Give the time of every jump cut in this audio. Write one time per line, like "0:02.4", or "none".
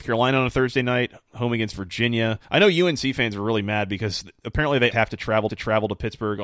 0:02.4
0:04.9
0:05.5